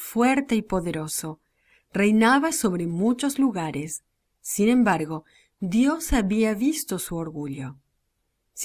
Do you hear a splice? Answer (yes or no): no